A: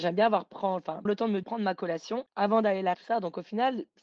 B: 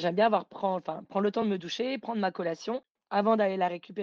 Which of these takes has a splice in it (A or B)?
A